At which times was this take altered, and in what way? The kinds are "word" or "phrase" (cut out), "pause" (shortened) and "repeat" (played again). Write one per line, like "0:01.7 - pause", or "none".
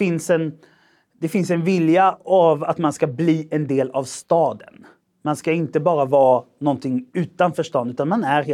none